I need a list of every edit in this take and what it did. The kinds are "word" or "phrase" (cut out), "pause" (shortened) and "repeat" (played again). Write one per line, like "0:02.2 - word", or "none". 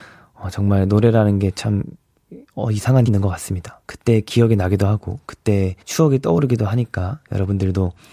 0:02.5 - pause
0:03.1 - word
0:03.8 - pause
0:05.8 - pause